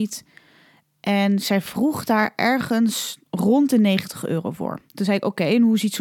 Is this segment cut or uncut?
cut